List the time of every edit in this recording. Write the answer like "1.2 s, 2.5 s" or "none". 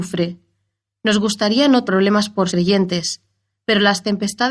1.9 s, 2.5 s